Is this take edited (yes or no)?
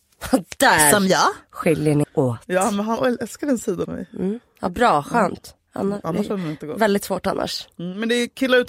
yes